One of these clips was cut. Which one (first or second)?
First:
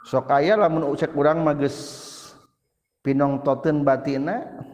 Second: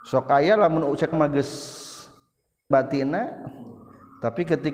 second